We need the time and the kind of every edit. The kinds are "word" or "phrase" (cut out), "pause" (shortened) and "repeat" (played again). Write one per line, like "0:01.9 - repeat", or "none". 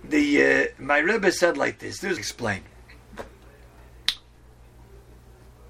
0:02.2 - phrase